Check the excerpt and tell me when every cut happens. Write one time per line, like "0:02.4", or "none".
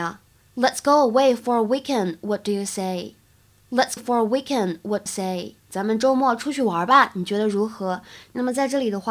0:04.0
0:05.1
0:05.6